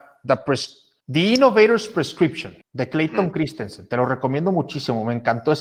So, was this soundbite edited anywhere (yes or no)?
yes